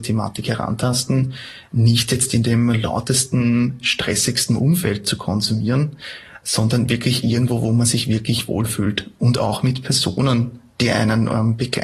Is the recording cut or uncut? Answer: uncut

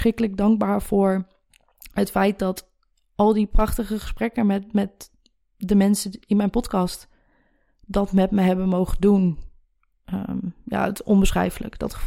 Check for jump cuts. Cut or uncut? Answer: uncut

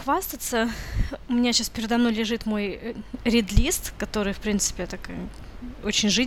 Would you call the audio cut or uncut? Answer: uncut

